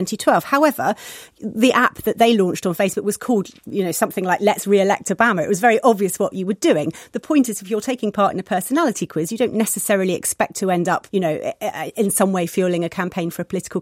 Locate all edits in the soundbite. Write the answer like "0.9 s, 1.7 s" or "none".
11.1 s